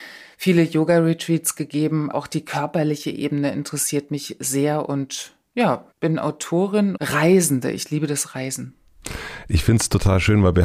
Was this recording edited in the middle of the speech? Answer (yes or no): yes